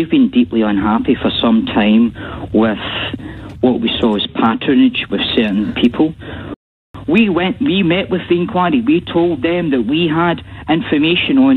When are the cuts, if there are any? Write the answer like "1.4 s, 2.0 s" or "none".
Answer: none